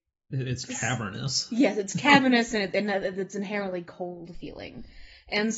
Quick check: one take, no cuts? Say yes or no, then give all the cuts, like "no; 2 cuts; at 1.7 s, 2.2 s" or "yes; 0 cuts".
yes; 0 cuts